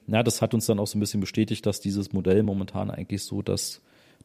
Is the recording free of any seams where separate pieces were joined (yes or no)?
yes